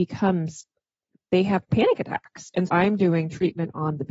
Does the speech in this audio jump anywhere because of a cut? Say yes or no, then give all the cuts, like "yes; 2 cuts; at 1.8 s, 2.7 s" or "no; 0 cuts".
yes; 2 cuts; at 1.7 s, 2.7 s